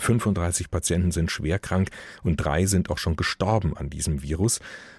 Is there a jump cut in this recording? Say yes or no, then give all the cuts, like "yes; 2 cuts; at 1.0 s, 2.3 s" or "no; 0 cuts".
no; 0 cuts